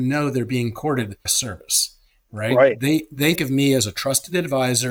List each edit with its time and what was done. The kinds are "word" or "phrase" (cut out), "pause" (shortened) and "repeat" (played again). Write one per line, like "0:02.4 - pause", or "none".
0:01.3 - word
0:03.4 - word